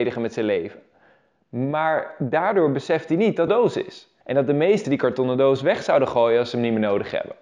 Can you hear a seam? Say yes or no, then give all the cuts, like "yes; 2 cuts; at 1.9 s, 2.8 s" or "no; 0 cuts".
yes; 3 cuts; at 3.5 s, 4.2 s, 4.8 s